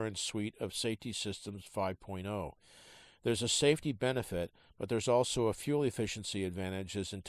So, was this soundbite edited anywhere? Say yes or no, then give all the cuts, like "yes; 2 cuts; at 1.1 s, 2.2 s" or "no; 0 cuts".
no; 0 cuts